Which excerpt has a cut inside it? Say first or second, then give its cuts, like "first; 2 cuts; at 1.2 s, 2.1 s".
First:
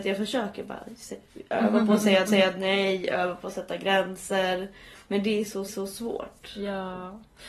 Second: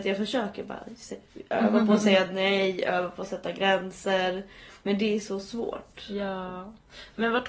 first; 2 cuts; at 2.3 s, 5.7 s